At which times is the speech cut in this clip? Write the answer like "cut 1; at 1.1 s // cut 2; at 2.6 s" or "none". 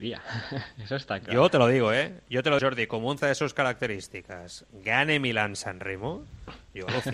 cut 1; at 2.6 s // cut 2; at 3.2 s